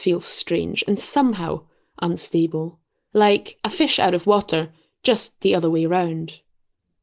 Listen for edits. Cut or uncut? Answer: uncut